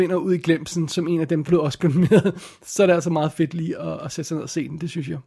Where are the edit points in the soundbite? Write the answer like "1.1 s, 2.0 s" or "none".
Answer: 1.5 s